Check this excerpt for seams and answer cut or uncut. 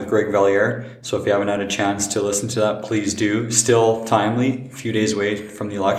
uncut